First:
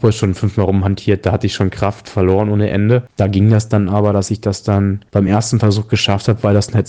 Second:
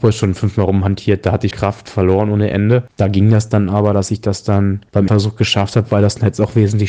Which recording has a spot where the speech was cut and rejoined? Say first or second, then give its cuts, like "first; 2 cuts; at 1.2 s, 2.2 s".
second; 2 cuts; at 1.5 s, 5.1 s